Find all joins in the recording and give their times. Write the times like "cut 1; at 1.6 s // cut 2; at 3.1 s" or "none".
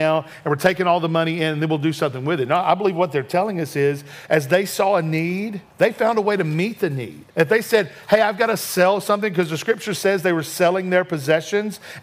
cut 1; at 5.7 s // cut 2; at 7.3 s